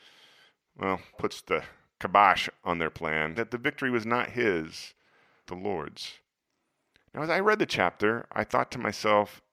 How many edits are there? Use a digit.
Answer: 3